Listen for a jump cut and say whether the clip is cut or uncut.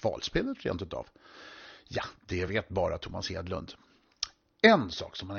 uncut